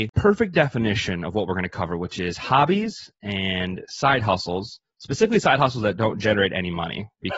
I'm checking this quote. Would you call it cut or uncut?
uncut